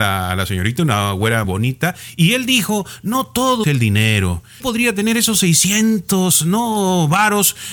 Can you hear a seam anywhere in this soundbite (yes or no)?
yes